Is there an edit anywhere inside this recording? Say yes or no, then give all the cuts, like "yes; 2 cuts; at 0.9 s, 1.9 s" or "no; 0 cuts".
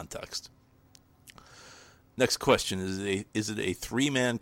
no; 0 cuts